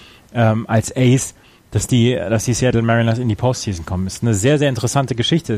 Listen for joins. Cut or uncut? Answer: uncut